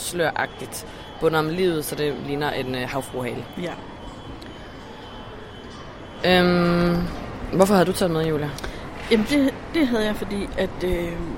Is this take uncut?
yes; 0 cuts

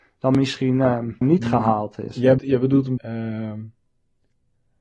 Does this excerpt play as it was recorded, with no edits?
no; 3 cuts; at 1.2 s, 2.4 s, 3.0 s

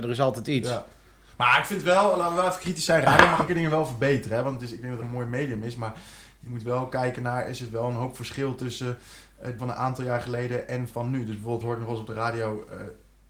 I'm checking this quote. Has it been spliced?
yes; 5 cuts; at 3.5 s, 5.0 s, 9.6 s, 10.9 s, 11.6 s

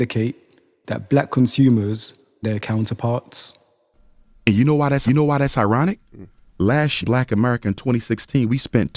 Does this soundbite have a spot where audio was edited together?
yes; 3 cuts; at 2.4 s, 5.1 s, 7.0 s

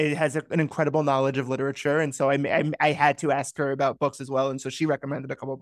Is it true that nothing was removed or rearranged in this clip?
yes; 0 cuts

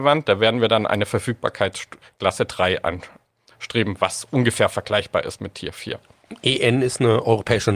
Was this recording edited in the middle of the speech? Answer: no; 0 cuts

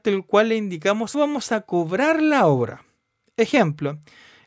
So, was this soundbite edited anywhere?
yes; 1 cut; at 1.1 s

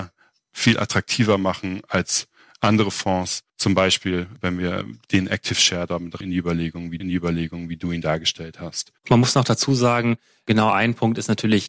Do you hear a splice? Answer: yes; 3 cuts; at 3.5 s, 6.2 s, 7.0 s

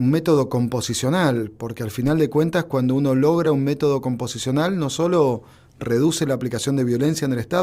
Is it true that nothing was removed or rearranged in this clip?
yes; 0 cuts

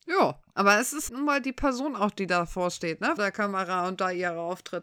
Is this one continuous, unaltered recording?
no; 2 cuts; at 1.1 s, 3.2 s

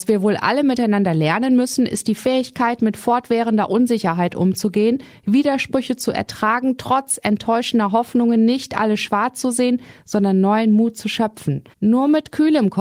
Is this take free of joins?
no; 1 cut; at 11.7 s

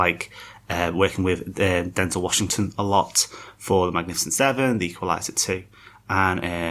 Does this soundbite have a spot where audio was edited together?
no; 0 cuts

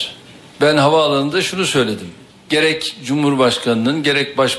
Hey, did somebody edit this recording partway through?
no; 0 cuts

